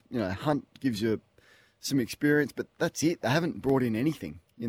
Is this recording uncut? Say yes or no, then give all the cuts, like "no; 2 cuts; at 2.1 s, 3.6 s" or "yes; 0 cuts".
yes; 0 cuts